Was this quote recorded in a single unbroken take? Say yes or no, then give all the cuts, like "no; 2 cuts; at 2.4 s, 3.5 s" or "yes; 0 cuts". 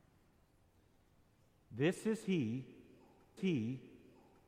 no; 1 cut; at 3.4 s